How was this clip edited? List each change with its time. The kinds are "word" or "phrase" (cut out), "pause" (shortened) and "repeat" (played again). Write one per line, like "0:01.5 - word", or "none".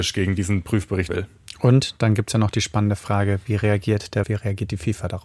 0:01.1 - word
0:04.2 - word

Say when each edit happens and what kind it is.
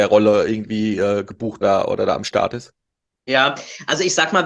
0:01.6 - phrase

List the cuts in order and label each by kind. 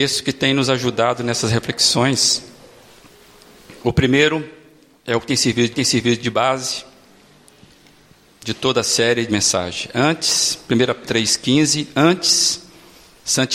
0:05.7 - repeat
0:09.3 - word
0:11.0 - word

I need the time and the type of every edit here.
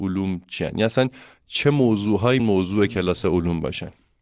0:02.4 - word

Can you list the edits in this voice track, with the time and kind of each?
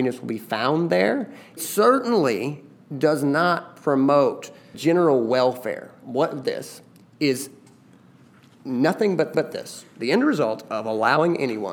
0:01.6 - word
0:04.7 - word
0:06.4 - phrase
0:09.3 - repeat

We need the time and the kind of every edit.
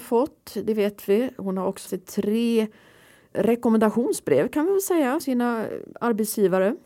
0:01.9 - word
0:03.3 - word
0:05.2 - word

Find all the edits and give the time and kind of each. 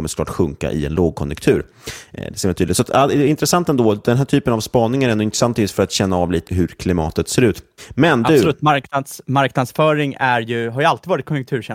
0:06.5 - word

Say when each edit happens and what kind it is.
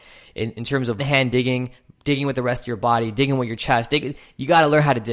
0:01.0 - word

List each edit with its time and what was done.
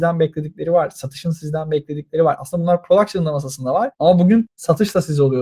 none

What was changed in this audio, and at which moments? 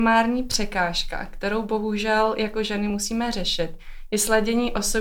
none

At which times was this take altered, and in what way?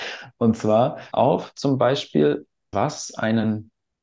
0:01.1 - word
0:02.7 - word

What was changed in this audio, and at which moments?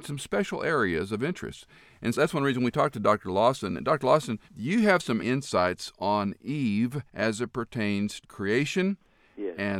0:02.1 - word
0:04.5 - pause
0:05.2 - word
0:07.1 - pause
0:08.2 - word

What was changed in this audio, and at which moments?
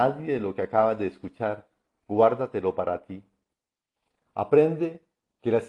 none

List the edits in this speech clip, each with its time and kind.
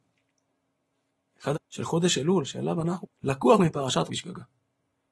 0:01.5 - word
0:03.0 - word
0:04.1 - word

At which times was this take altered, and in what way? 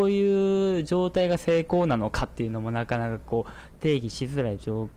none

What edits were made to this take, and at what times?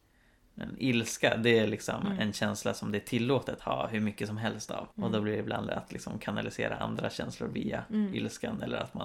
0:03.6 - word
0:04.9 - pause
0:05.7 - word

